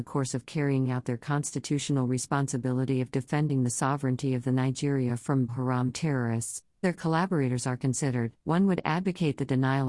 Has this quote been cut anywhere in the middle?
yes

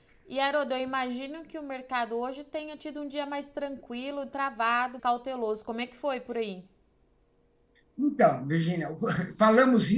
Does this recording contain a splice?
yes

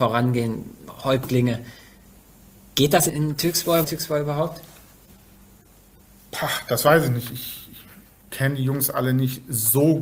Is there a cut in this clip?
yes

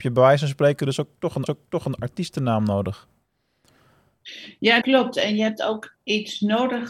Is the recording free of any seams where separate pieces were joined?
no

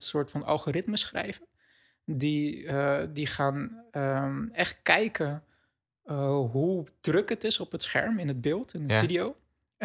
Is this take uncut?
yes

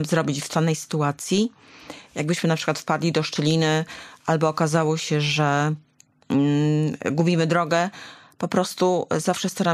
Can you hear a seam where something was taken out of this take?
no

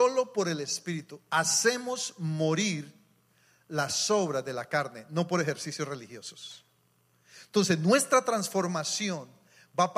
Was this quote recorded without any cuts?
yes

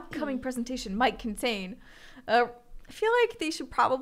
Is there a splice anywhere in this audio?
no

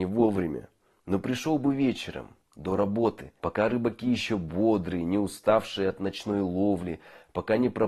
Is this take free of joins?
no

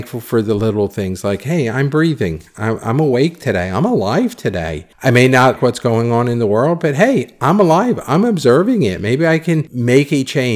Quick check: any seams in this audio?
yes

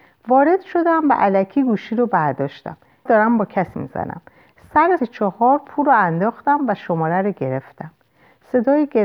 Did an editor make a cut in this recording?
yes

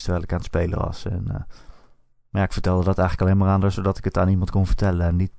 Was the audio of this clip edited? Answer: no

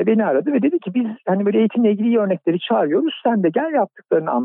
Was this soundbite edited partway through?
no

